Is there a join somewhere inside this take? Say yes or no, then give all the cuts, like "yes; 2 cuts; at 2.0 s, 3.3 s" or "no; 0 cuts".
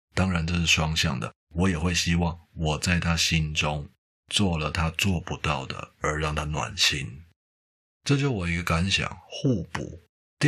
no; 0 cuts